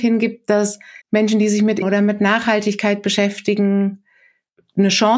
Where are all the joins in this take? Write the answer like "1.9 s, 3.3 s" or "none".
1.0 s, 1.8 s